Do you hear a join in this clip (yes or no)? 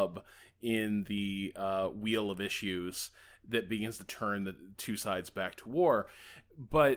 no